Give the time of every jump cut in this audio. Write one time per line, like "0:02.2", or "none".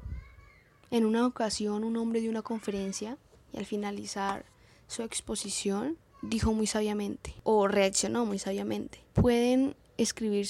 none